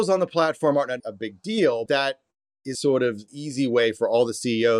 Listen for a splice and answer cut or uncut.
cut